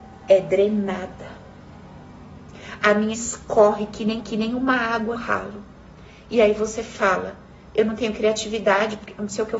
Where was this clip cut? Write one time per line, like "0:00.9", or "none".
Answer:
0:03.1
0:04.2
0:05.1